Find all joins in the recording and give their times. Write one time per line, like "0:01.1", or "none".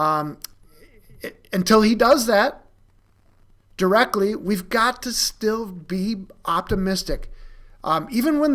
none